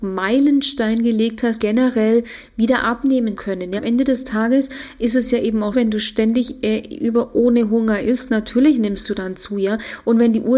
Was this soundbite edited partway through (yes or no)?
yes